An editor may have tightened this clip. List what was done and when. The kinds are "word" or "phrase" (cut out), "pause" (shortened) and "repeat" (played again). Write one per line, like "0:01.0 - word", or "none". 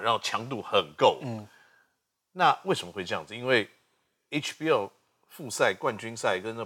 none